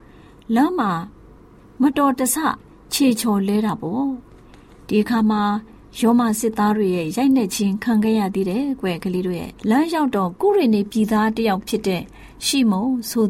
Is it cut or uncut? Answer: cut